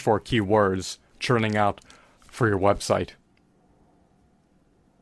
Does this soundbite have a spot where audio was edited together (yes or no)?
yes